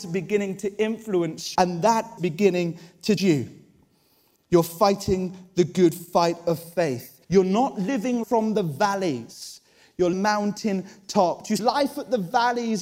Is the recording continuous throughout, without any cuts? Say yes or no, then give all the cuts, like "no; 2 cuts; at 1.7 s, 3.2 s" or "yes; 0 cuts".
no; 7 cuts; at 1.5 s, 2.2 s, 3.2 s, 7.2 s, 8.2 s, 10.1 s, 11.6 s